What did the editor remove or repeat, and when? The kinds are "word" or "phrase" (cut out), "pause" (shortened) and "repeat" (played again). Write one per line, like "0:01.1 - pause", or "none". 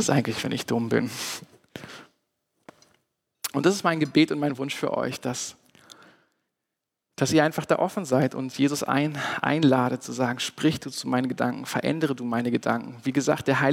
none